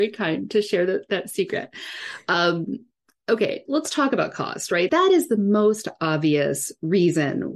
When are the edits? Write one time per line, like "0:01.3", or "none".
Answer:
0:03.7
0:04.9